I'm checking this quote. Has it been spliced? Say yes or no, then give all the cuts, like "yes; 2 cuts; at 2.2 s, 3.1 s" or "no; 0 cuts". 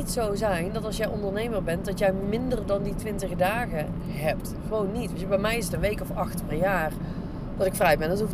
no; 0 cuts